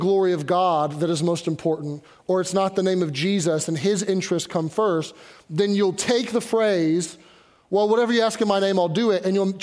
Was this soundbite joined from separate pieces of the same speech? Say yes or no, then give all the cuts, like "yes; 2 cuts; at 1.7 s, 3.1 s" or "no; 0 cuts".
no; 0 cuts